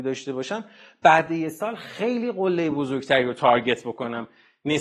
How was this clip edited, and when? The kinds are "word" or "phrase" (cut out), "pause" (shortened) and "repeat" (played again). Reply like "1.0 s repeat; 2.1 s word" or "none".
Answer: none